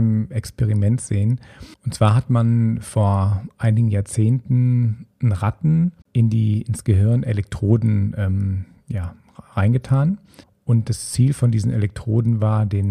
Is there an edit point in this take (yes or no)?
yes